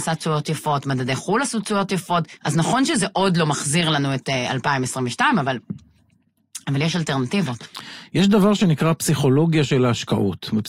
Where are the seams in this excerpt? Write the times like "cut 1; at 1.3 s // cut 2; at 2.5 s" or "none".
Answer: cut 1; at 2.4 s